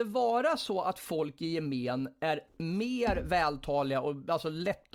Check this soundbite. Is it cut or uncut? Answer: cut